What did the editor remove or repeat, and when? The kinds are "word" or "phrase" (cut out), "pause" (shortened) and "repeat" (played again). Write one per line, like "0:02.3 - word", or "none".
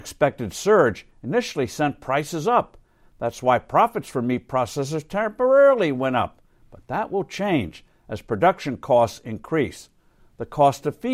none